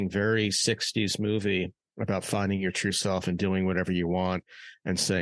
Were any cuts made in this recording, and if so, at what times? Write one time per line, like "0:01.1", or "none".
none